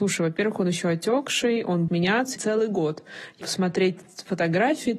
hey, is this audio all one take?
no; 3 cuts; at 1.9 s, 2.4 s, 3.4 s

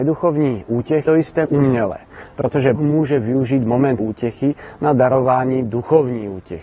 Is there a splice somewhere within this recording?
yes; 4 cuts; at 1.1 s, 1.5 s, 2.8 s, 4.0 s

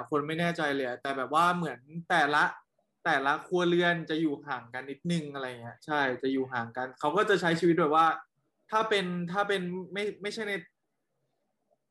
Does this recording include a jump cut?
no; 0 cuts

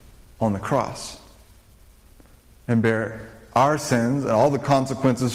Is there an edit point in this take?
no; 0 cuts

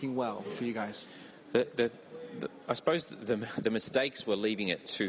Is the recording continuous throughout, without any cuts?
yes; 0 cuts

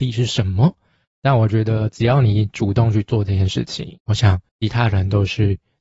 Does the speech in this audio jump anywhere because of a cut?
yes; 1 cut; at 4.5 s

